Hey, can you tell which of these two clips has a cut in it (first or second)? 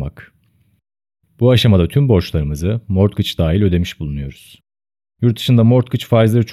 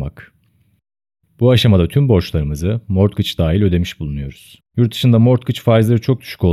second